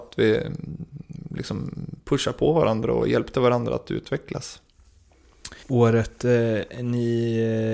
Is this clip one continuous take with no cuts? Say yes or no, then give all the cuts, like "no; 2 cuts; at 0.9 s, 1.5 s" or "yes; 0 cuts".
no; 1 cut; at 5.6 s